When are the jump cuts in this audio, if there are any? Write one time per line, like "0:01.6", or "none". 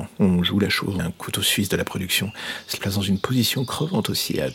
0:01.0
0:02.8